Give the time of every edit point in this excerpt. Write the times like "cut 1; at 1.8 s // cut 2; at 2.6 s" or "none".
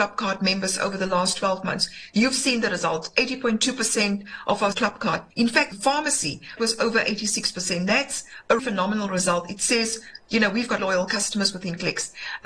cut 1; at 4.7 s // cut 2; at 5.3 s // cut 3; at 5.7 s // cut 4; at 6.6 s // cut 5; at 8.6 s // cut 6; at 10.8 s